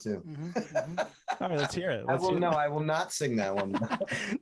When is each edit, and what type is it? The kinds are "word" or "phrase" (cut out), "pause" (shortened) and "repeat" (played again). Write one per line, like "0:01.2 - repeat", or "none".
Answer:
none